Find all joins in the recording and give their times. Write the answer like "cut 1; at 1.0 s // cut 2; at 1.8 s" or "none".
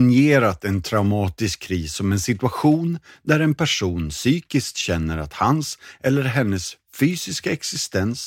none